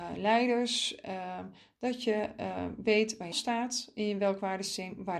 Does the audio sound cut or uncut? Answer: cut